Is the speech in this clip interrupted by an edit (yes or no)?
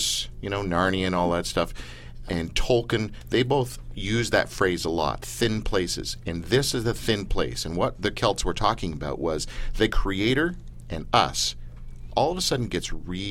yes